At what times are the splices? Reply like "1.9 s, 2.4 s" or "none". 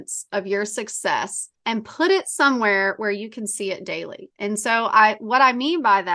1.5 s